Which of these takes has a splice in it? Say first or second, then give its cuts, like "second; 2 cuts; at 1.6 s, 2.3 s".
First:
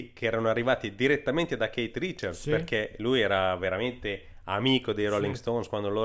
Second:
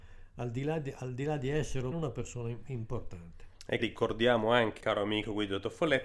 second; 3 cuts; at 1.9 s, 3.8 s, 4.8 s